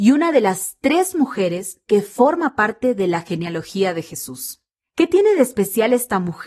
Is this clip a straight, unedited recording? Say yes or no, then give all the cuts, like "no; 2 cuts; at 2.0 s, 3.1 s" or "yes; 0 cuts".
yes; 0 cuts